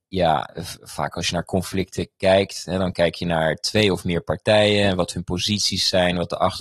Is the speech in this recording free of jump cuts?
yes; 0 cuts

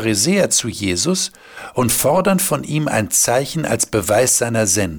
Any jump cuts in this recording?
no; 0 cuts

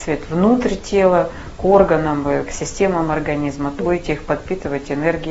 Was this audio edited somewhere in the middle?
yes; 1 cut; at 3.8 s

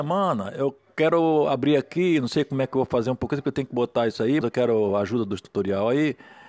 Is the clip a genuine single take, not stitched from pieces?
no; 1 cut; at 4.4 s

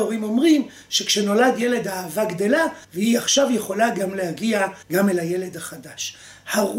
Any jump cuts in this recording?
yes; 2 cuts; at 2.8 s, 4.8 s

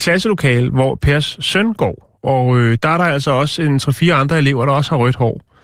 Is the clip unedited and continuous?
yes; 0 cuts

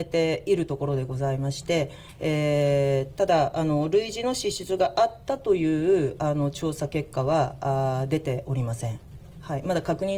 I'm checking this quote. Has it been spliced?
no; 0 cuts

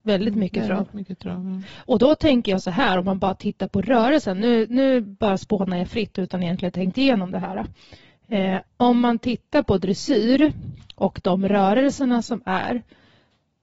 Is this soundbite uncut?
no; 1 cut; at 8.7 s

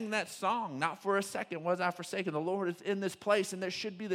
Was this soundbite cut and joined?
no; 0 cuts

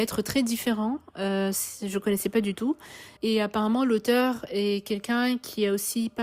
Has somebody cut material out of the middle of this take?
yes; 1 cut; at 3.2 s

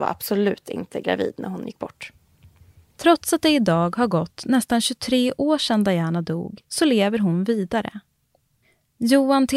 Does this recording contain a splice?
no; 0 cuts

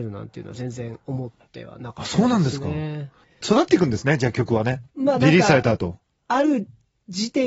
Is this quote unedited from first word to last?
no; 1 cut; at 4.9 s

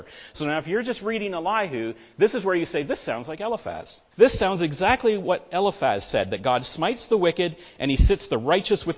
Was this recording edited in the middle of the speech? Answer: yes; 1 cut; at 4.1 s

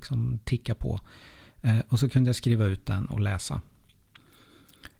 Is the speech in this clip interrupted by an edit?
no; 0 cuts

